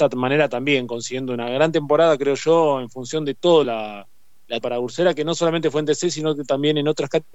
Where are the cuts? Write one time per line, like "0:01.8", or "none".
0:03.6
0:04.6